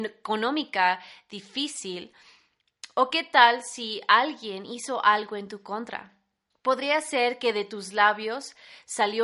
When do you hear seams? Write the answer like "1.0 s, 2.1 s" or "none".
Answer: 6.5 s